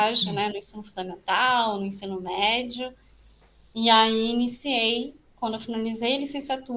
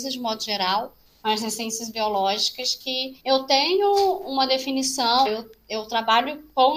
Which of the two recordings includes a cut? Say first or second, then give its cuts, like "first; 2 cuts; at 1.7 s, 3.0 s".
second; 3 cuts; at 1.1 s, 3.2 s, 5.3 s